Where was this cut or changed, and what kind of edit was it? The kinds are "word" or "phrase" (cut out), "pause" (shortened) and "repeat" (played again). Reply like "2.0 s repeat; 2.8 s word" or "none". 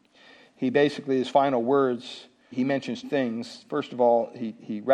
2.5 s word; 3.0 s word